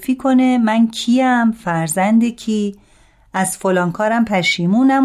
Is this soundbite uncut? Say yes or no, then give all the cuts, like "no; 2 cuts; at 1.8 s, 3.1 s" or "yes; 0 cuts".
yes; 0 cuts